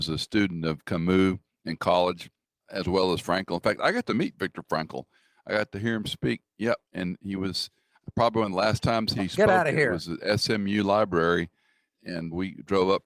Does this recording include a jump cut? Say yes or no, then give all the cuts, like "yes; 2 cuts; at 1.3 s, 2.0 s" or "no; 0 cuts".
yes; 1 cut; at 2.4 s